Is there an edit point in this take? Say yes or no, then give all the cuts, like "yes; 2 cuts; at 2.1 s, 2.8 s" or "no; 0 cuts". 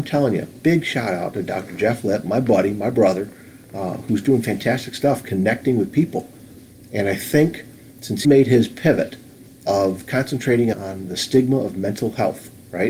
yes; 3 cuts; at 3.6 s, 8.2 s, 10.7 s